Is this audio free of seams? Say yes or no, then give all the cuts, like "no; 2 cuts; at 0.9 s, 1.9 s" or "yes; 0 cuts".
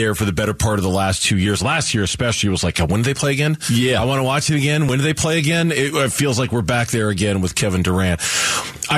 yes; 0 cuts